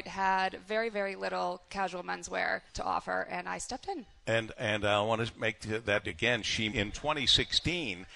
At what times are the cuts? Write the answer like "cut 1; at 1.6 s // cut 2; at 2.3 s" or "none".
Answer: cut 1; at 0.9 s // cut 2; at 2.7 s // cut 3; at 6.0 s // cut 4; at 6.7 s